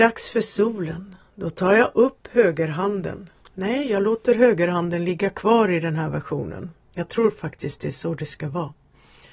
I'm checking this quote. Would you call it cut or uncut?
cut